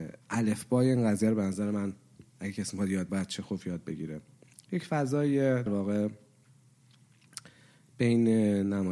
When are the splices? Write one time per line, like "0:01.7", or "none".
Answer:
0:03.1
0:05.7